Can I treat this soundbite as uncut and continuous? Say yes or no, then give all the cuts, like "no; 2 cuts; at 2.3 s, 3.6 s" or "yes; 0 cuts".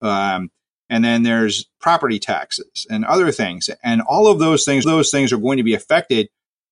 no; 1 cut; at 4.8 s